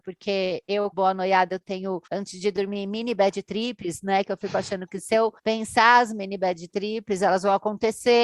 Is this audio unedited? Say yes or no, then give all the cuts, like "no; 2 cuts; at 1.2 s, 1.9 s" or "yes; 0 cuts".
no; 3 cuts; at 0.9 s, 2.1 s, 5.4 s